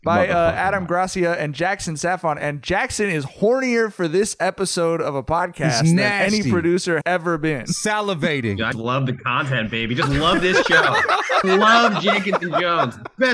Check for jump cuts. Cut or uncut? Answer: cut